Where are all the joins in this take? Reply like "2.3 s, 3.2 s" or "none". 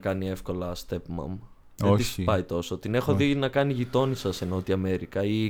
none